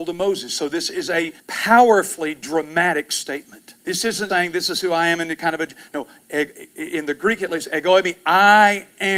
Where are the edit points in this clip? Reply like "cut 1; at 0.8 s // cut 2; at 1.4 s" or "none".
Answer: cut 1; at 1.4 s // cut 2; at 3.8 s // cut 3; at 4.3 s